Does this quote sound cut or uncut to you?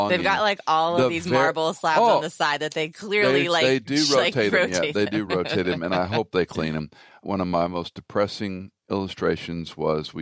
uncut